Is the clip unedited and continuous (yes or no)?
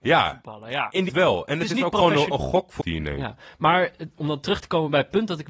no